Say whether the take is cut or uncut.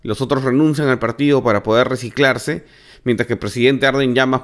uncut